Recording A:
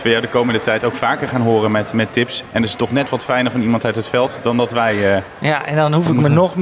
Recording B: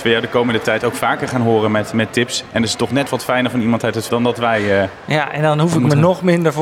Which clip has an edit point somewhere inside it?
B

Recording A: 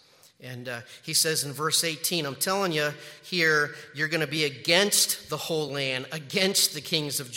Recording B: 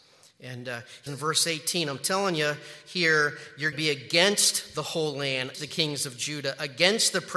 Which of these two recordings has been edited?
B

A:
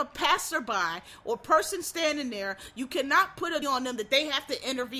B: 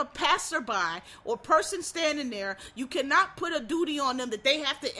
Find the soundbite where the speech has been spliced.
A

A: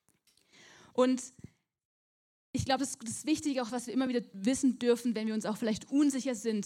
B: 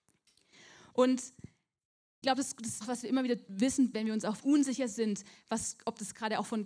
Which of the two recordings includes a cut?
B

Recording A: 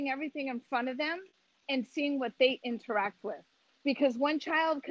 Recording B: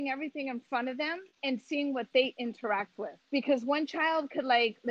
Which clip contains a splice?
B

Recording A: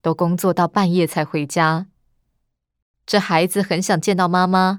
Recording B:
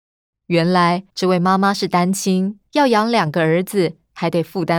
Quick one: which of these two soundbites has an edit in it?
B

